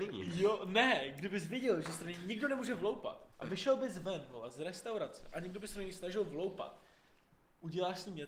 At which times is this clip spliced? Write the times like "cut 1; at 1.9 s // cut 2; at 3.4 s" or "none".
cut 1; at 3.3 s